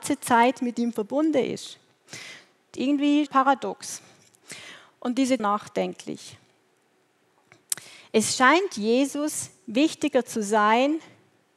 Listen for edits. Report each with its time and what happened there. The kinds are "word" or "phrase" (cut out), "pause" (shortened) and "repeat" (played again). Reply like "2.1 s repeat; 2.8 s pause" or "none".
2.8 s word; 3.3 s word; 5.4 s phrase